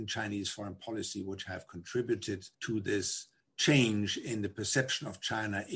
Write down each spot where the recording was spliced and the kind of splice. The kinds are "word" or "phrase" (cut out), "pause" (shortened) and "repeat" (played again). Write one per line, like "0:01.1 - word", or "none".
0:02.5 - pause
0:03.4 - pause